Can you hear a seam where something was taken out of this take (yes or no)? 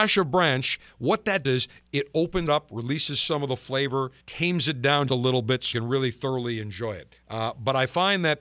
yes